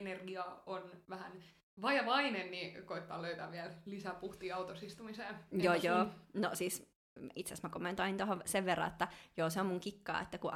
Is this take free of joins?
yes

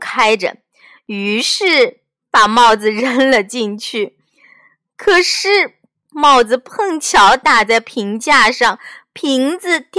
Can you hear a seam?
no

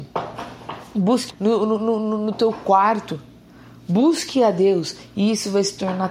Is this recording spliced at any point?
yes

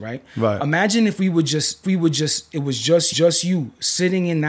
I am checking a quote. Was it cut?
yes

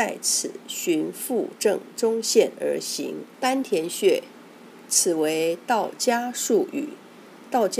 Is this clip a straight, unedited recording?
no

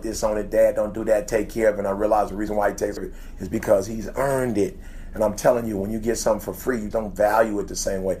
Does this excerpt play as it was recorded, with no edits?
no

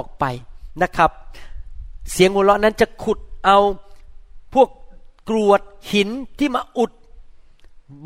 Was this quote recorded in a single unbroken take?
yes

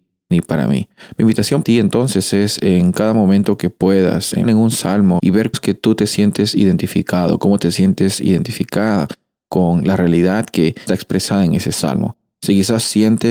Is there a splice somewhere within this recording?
yes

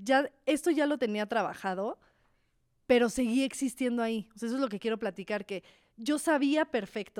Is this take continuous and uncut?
yes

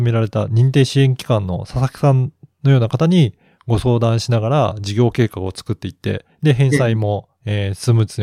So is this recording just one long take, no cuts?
yes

